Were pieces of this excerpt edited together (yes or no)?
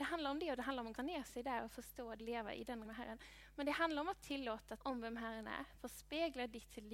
yes